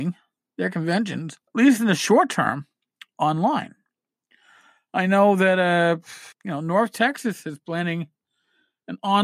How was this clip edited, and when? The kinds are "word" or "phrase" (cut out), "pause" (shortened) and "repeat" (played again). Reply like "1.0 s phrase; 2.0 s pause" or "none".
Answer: 1.5 s pause; 6.3 s pause